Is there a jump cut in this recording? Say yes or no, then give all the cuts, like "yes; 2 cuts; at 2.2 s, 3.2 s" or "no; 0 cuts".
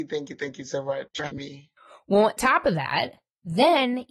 yes; 2 cuts; at 1.3 s, 2.4 s